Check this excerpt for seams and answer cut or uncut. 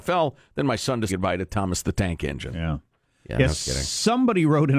cut